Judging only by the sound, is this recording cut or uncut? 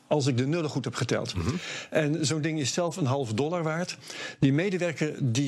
uncut